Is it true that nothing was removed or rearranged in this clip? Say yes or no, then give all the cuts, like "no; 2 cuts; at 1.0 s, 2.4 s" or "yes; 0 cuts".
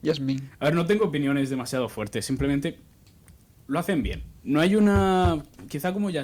no; 1 cut; at 4.4 s